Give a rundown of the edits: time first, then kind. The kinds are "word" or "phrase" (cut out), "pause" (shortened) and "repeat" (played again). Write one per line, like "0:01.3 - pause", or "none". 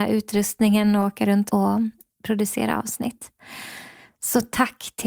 0:01.5 - phrase

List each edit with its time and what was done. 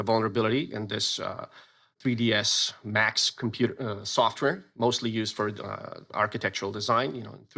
none

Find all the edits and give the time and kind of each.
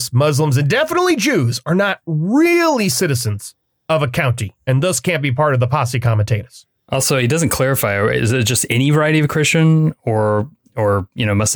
none

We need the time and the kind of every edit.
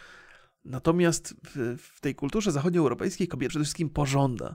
0:03.5 - word

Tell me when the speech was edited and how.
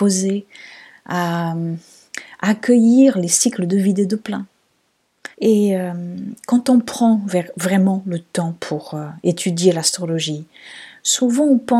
0:05.3 - pause

